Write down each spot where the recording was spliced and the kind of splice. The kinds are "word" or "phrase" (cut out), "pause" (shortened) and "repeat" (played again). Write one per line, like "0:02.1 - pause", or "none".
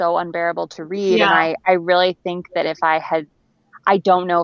none